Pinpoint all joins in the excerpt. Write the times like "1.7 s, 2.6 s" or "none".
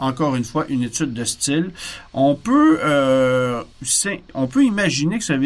3.7 s

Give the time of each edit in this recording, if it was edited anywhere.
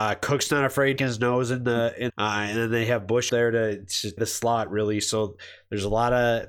1.0 s, 2.1 s, 3.3 s, 4.2 s

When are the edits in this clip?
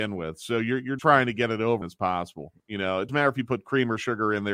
1.0 s, 1.8 s, 2.6 s, 3.1 s

